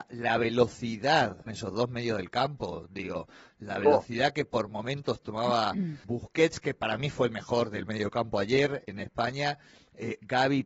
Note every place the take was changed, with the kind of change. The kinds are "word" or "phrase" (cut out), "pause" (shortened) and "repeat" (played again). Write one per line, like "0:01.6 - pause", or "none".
0:01.5 - phrase
0:06.0 - word